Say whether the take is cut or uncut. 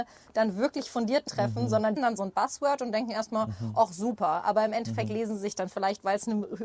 cut